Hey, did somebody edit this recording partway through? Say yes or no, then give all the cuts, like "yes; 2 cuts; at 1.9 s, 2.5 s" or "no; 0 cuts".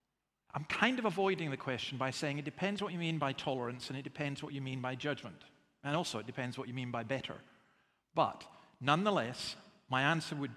no; 0 cuts